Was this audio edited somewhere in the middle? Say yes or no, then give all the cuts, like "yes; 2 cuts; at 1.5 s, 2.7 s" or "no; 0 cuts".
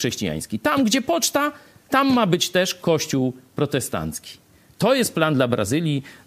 no; 0 cuts